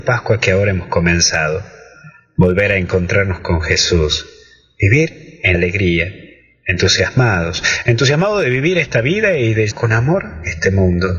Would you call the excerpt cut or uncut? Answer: cut